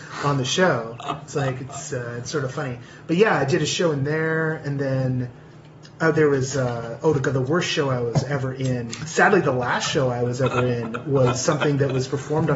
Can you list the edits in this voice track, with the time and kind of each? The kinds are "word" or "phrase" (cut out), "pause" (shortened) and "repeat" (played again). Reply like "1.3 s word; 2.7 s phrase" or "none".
none